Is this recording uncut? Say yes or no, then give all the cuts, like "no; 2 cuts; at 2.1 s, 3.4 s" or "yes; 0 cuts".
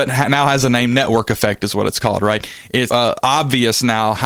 no; 1 cut; at 2.9 s